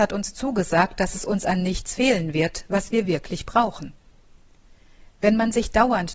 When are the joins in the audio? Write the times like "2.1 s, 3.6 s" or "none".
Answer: none